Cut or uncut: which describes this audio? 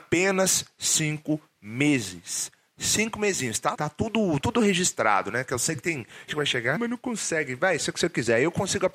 cut